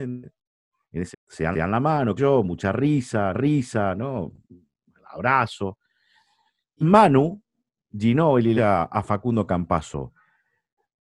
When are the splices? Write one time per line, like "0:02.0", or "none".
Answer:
0:01.1
0:01.5
0:02.2
0:03.3
0:06.8
0:08.6